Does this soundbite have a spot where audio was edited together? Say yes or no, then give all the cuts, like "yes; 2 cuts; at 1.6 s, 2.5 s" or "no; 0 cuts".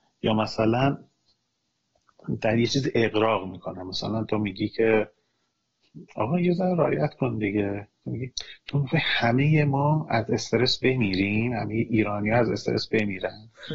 no; 0 cuts